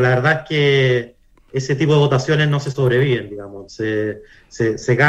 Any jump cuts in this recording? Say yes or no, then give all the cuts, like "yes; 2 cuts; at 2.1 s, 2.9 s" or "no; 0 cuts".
no; 0 cuts